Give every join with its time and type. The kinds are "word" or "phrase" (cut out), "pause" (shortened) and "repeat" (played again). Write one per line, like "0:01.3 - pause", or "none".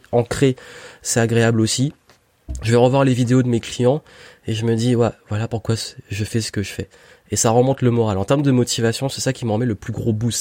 none